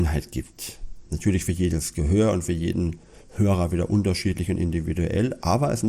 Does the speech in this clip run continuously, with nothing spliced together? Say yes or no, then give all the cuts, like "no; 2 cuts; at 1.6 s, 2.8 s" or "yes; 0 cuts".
yes; 0 cuts